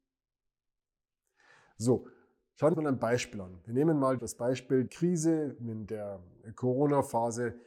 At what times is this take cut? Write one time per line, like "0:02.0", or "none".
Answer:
0:02.7
0:04.2
0:04.9